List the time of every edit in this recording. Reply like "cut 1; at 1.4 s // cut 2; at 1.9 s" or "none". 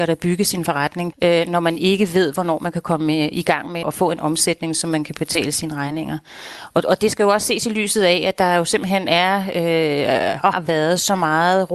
cut 1; at 1.1 s // cut 2; at 3.8 s // cut 3; at 10.5 s